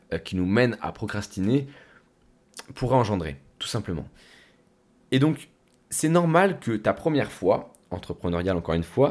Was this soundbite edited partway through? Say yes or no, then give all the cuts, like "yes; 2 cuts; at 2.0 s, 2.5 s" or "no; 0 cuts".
no; 0 cuts